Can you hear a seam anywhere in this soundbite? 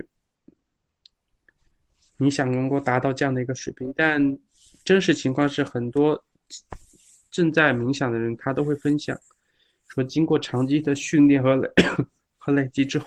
no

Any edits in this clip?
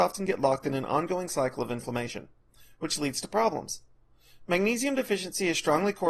no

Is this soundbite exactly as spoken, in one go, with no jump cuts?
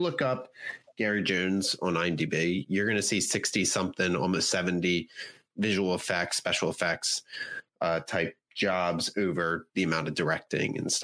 no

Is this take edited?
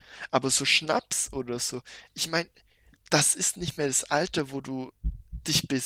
no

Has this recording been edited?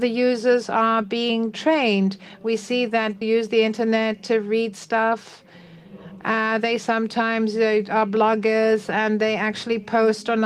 yes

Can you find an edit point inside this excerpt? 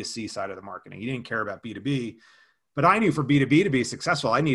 no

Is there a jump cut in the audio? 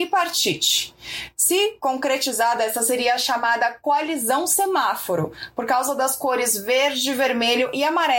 no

